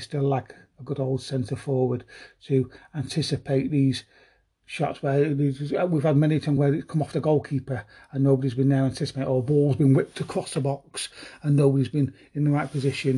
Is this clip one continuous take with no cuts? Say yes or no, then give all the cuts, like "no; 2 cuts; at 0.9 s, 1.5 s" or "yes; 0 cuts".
yes; 0 cuts